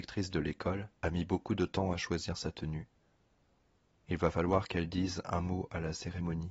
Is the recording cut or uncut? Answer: cut